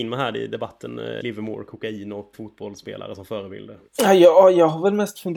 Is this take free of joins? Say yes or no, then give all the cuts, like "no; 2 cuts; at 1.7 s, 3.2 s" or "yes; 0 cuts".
no; 3 cuts; at 1.2 s, 2.3 s, 3.9 s